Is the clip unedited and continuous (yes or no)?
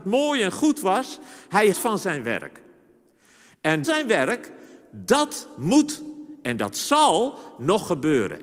no